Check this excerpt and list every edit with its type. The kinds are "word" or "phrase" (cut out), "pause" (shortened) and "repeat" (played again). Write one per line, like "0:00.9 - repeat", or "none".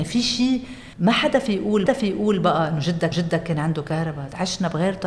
0:00.9 - pause
0:01.9 - repeat
0:03.1 - repeat